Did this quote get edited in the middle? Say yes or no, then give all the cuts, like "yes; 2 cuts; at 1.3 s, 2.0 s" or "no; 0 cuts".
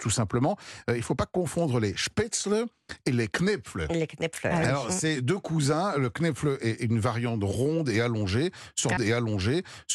yes; 1 cut; at 9.0 s